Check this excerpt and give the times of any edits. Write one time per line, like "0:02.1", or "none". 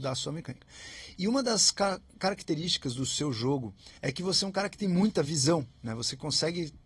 0:04.0